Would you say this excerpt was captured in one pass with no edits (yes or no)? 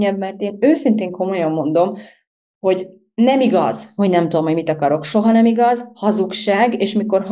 yes